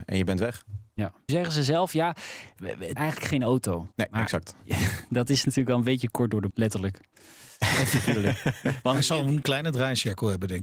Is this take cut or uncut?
cut